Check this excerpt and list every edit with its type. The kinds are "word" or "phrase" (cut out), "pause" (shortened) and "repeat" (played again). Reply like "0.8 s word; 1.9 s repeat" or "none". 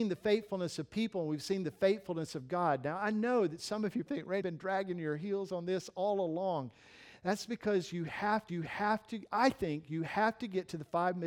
4.1 s word; 4.4 s word; 8.5 s repeat